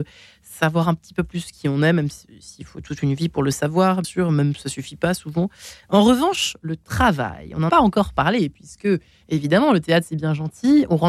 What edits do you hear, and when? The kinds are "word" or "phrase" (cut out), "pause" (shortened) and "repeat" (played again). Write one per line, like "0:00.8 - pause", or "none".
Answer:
0:04.0 - word
0:07.7 - word